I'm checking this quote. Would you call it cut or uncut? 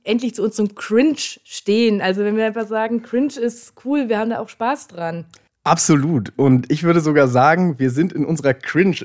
uncut